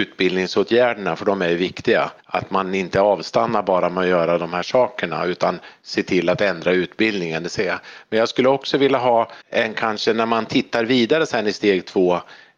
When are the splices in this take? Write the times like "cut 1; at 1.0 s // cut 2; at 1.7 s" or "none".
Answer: cut 1; at 2.2 s // cut 2; at 9.4 s

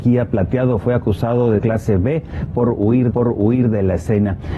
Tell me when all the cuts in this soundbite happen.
cut 1; at 1.6 s // cut 2; at 3.1 s

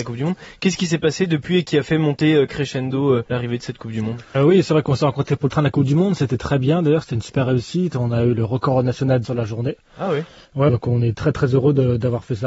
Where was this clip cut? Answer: cut 1; at 3.3 s // cut 2; at 4.3 s // cut 3; at 9.2 s // cut 4; at 10.7 s

